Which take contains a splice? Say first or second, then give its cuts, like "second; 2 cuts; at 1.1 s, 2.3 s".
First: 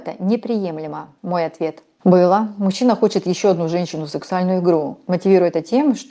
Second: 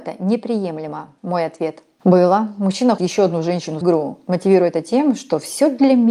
second; 2 cuts; at 3.0 s, 3.8 s